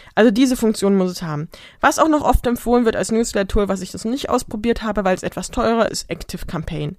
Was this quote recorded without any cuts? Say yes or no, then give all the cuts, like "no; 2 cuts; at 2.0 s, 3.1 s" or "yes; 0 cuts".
no; 1 cut; at 5.9 s